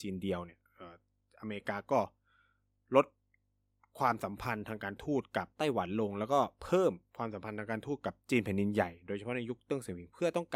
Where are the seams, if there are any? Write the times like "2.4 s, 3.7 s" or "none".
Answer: 5.5 s, 8.2 s